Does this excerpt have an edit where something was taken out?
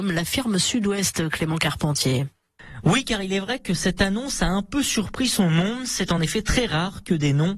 no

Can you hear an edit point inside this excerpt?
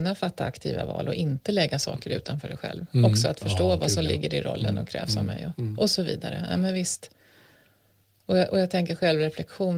no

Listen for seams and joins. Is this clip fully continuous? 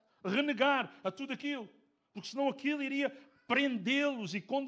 yes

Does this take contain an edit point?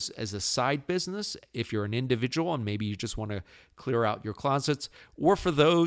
no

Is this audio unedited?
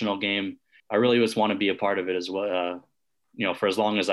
yes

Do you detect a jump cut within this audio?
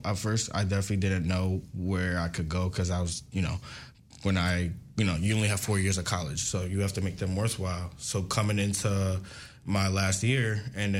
no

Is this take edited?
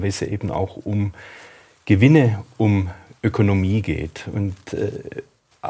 no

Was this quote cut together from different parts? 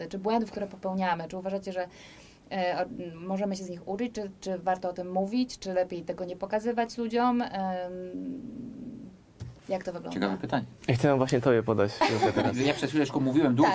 yes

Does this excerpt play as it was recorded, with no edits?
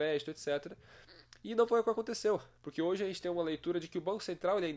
yes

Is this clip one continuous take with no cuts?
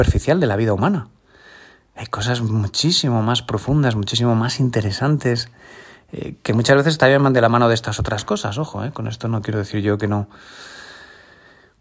yes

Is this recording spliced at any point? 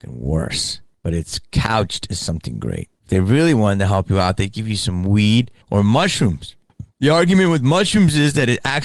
yes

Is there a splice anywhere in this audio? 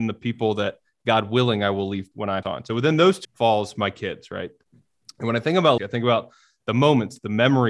yes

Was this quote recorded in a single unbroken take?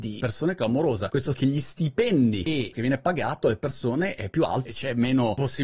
no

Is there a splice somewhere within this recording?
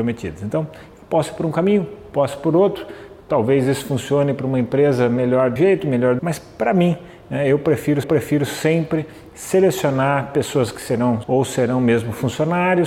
yes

